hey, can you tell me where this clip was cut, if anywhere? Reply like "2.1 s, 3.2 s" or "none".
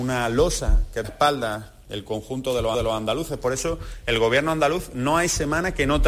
1.0 s, 2.7 s